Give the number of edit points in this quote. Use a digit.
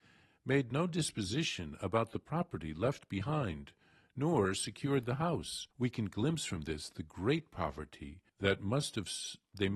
2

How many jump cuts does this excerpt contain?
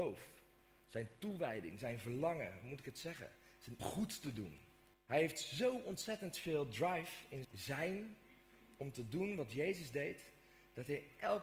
3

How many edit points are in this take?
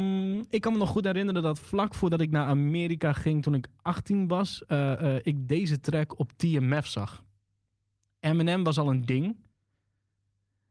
0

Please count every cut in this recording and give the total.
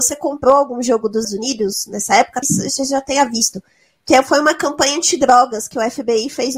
2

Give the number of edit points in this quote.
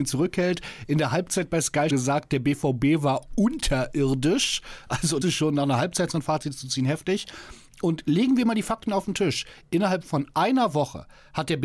2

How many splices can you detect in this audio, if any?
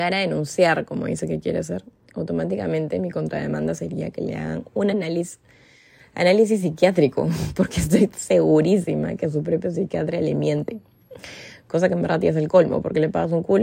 0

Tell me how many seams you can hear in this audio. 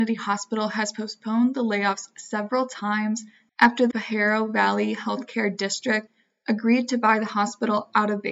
1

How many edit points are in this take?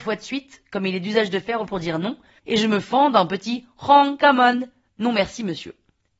1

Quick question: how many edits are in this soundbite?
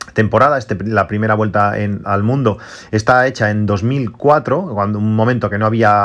1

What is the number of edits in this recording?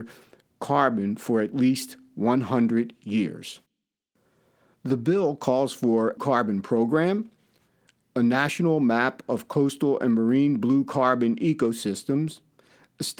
1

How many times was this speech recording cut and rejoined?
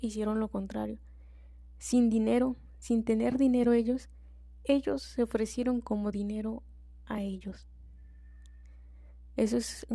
0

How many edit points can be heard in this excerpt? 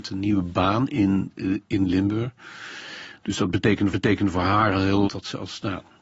2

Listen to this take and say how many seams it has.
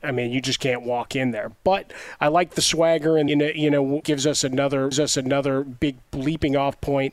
3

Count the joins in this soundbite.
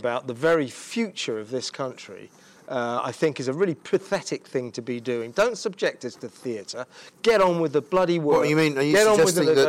0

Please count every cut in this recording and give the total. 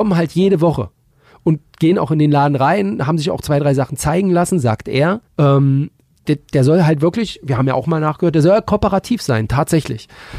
1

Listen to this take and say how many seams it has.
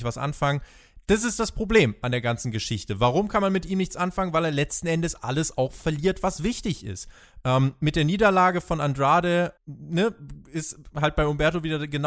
1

